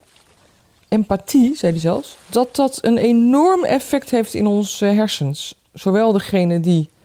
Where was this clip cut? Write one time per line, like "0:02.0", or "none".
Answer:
0:02.2